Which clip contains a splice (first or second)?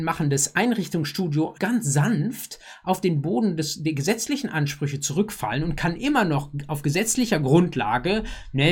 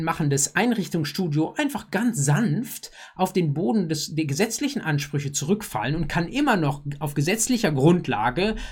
first